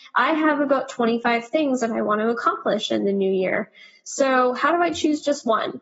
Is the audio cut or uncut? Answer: uncut